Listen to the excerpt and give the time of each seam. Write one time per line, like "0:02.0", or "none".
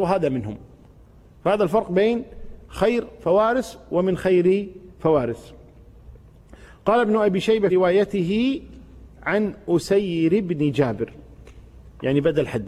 0:04.9
0:07.7